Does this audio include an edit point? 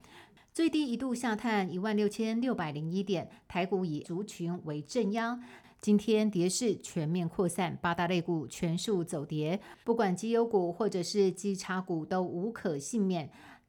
yes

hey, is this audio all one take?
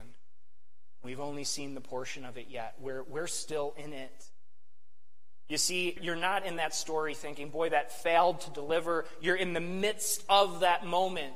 no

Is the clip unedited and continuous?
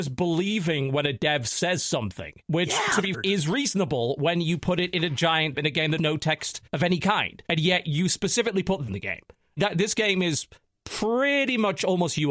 no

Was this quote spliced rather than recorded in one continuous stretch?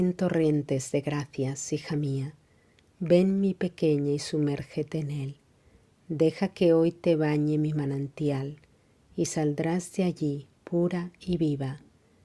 no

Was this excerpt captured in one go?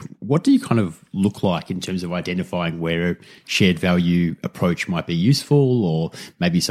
yes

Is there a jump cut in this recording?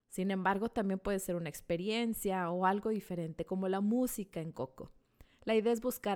no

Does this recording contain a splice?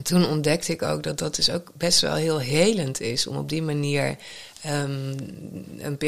no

